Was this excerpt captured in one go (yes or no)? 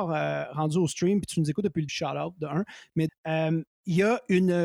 no